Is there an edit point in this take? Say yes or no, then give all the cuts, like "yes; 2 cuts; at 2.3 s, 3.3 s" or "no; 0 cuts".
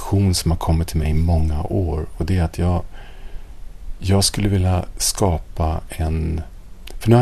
no; 0 cuts